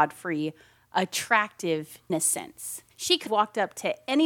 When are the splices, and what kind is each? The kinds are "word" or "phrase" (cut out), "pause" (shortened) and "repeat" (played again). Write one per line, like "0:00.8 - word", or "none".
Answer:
0:02.1 - word
0:02.9 - pause
0:03.3 - word